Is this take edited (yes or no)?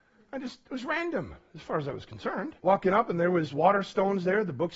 yes